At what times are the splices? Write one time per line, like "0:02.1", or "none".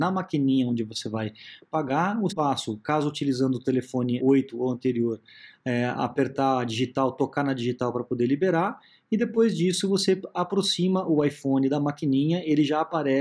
0:02.3
0:04.2